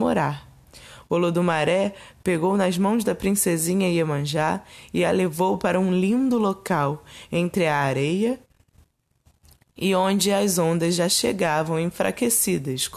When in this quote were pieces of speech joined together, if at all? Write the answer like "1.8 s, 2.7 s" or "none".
none